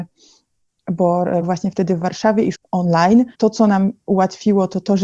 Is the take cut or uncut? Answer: cut